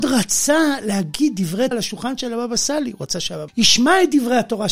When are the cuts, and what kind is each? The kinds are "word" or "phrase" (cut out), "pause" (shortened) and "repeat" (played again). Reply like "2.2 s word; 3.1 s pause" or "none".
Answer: 1.7 s word; 3.5 s word